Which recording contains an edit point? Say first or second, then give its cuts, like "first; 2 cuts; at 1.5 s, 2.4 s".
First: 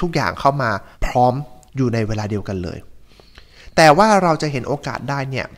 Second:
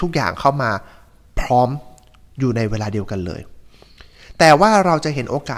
first; 2 cuts; at 0.9 s, 1.7 s